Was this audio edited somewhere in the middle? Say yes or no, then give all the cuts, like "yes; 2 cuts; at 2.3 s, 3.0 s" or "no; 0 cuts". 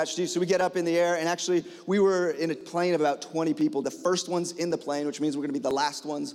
yes; 1 cut; at 3.8 s